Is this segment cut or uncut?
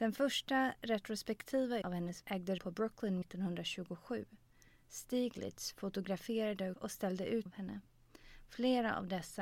cut